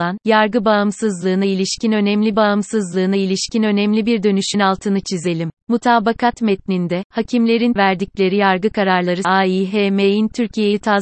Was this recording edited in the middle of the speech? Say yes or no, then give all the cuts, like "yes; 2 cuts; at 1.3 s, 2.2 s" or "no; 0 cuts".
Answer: yes; 5 cuts; at 2.3 s, 4.5 s, 5.6 s, 7.8 s, 9.2 s